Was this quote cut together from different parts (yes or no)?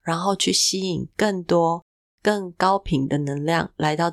no